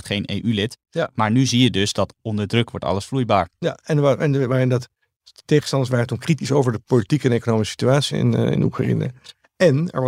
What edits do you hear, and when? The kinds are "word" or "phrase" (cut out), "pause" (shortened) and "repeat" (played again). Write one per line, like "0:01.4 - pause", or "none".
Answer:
0:08.1 - word

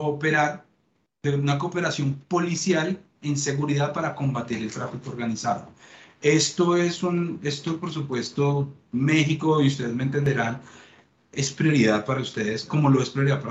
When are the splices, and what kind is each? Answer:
none

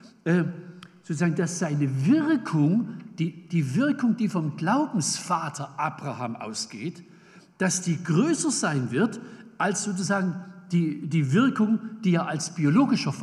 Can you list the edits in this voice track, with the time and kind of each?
none

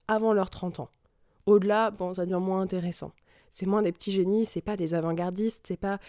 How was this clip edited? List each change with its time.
none

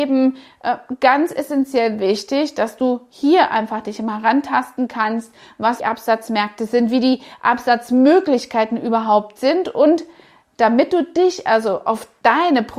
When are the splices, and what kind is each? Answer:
0:05.8 - phrase

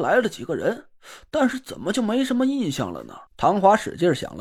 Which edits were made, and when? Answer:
0:03.3 - pause

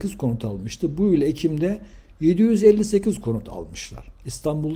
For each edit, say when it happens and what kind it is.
none

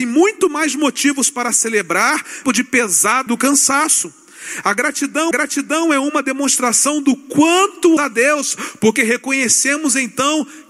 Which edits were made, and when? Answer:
0:02.4 - phrase
0:03.3 - word
0:05.3 - repeat
0:08.0 - word

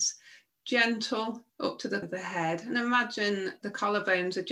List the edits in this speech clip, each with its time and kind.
0:01.5 - pause
0:02.0 - word
0:03.6 - word

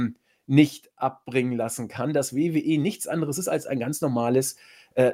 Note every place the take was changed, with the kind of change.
none

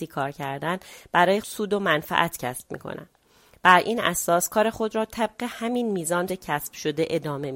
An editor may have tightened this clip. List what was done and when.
0:01.4 - word
0:06.3 - word

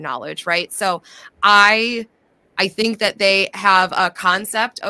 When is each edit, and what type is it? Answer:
none

